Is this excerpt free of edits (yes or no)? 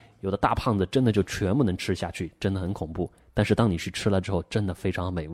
yes